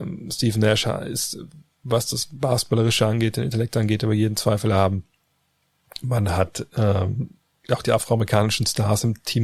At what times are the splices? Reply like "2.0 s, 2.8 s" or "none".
none

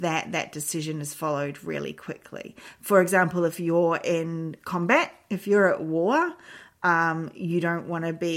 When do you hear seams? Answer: none

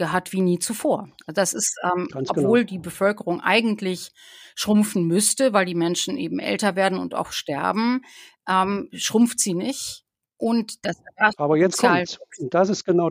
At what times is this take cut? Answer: none

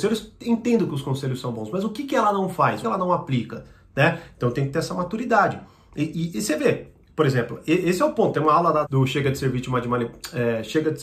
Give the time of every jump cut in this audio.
2.8 s, 8.8 s

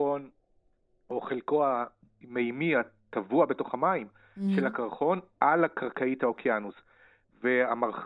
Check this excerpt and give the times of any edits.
none

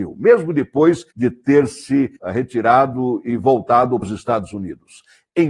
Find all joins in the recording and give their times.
1.1 s, 2.2 s, 4.0 s

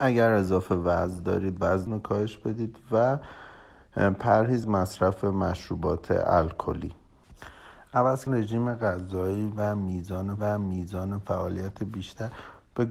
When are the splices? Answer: 1.9 s, 4.6 s, 8.3 s, 10.4 s

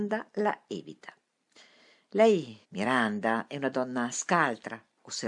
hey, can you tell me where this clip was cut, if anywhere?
2.6 s

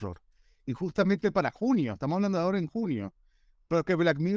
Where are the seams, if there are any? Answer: none

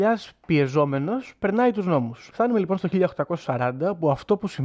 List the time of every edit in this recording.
2.3 s

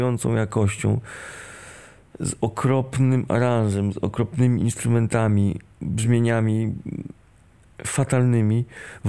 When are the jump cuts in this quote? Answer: none

